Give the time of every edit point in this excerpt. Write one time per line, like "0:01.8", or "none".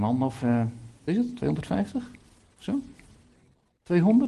0:01.1